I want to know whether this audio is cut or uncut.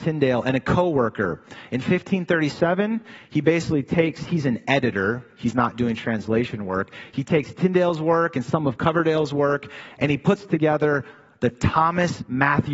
uncut